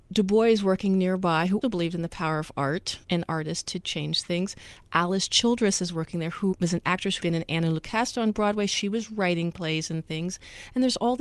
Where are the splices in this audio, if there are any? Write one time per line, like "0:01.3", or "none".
0:01.6
0:03.0
0:06.5
0:07.2